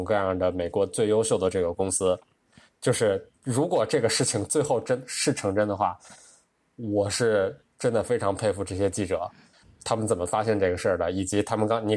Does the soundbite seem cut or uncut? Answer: uncut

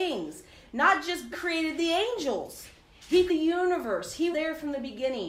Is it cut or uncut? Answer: cut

